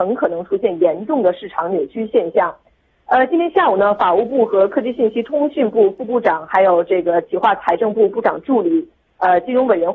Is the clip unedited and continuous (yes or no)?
yes